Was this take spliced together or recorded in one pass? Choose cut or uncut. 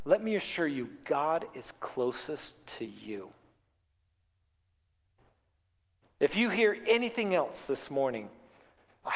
uncut